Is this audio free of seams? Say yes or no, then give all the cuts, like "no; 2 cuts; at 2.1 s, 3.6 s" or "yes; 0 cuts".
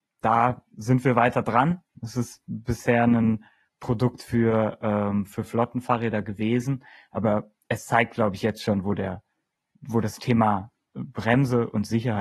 yes; 0 cuts